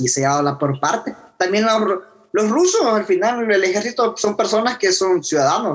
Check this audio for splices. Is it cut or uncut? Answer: uncut